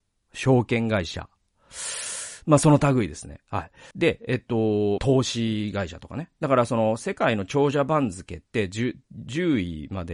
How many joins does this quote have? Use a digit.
3